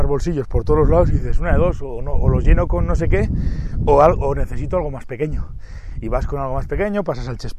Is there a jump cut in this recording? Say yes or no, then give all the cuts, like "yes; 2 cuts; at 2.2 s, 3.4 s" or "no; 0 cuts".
no; 0 cuts